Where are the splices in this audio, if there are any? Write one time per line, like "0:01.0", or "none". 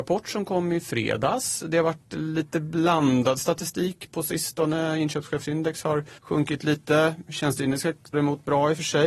0:04.1
0:06.2
0:08.1